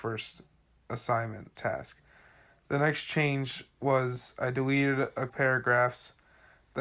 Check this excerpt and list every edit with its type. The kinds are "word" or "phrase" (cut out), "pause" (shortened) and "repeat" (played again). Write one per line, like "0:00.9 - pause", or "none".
0:01.6 - phrase
0:05.3 - word